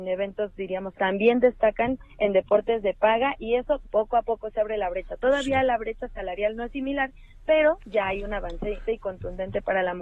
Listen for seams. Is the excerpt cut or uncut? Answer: cut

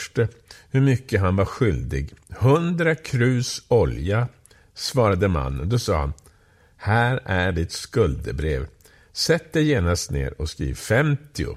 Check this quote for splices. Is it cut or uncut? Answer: uncut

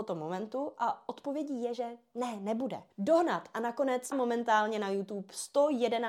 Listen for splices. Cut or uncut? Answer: cut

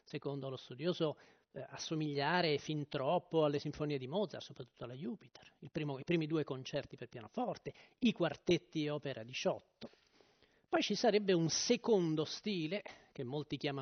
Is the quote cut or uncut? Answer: uncut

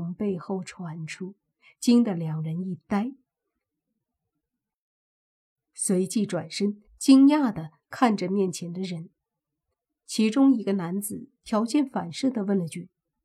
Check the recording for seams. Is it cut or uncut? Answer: uncut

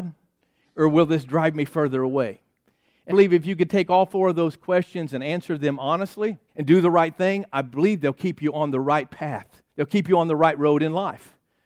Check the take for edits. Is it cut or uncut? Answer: cut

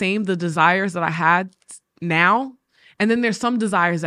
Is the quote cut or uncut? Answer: uncut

